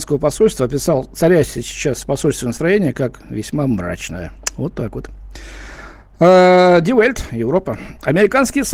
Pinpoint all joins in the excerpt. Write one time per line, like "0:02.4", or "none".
none